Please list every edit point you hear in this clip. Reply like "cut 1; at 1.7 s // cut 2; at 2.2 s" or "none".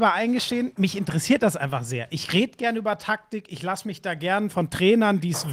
cut 1; at 4.5 s